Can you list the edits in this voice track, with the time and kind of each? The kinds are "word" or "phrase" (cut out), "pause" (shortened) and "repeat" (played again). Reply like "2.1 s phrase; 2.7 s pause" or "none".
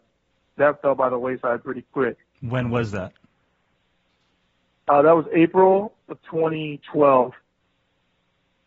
2.3 s pause